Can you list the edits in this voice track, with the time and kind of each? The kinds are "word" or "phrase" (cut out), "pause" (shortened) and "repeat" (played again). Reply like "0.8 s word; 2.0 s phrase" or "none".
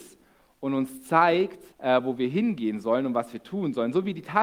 1.7 s pause